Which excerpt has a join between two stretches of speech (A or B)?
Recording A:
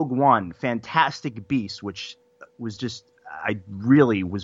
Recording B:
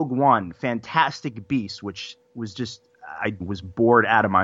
B